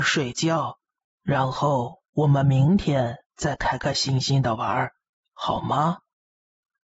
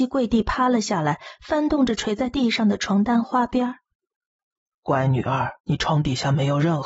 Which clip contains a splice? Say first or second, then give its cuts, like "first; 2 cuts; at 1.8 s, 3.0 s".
second; 1 cut; at 5.6 s